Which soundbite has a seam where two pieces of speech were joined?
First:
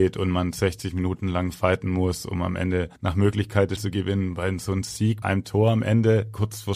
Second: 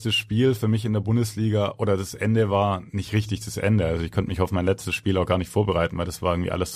first; 3 cuts; at 3.0 s, 3.8 s, 5.2 s

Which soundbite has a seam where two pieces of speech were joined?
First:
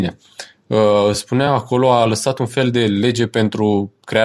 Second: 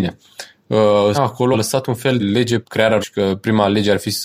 second; 5 cuts; at 1.1 s, 1.5 s, 2.2 s, 2.6 s, 3.0 s

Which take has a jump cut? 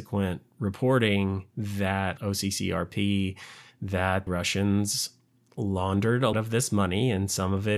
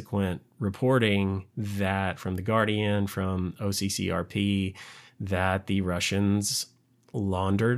first; 3 cuts; at 2.2 s, 4.3 s, 6.3 s

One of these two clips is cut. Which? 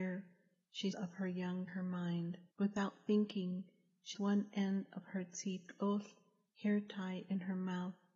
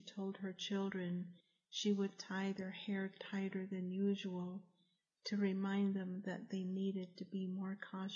first; 4 cuts; at 0.9 s, 1.7 s, 2.5 s, 4.1 s

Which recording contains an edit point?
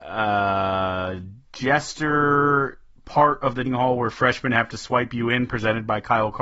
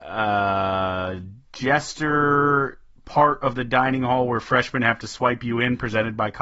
first; 1 cut; at 3.7 s

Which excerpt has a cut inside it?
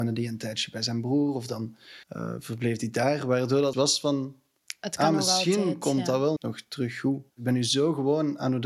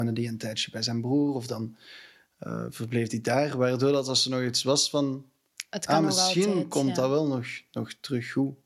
first; 4 cuts; at 2.0 s, 3.7 s, 6.4 s, 7.3 s

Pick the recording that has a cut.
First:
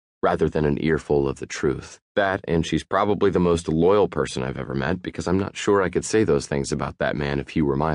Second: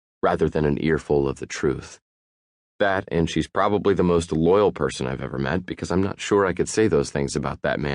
first; 1 cut; at 2.1 s

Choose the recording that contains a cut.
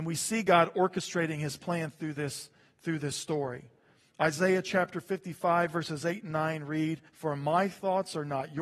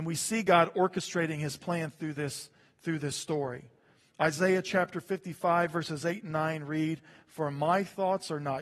first; 1 cut; at 7.1 s

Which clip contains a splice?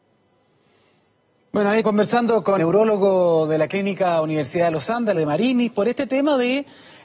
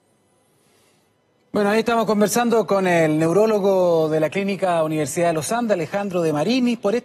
first; 3 cuts; at 1.8 s, 2.6 s, 5.1 s

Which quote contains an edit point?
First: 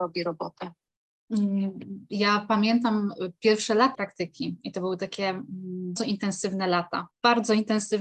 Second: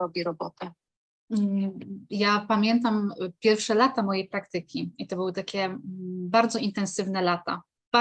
first; 3 cuts; at 3.9 s, 6.0 s, 7.1 s

